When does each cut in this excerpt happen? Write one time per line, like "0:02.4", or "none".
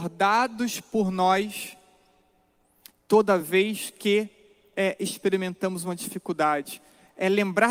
none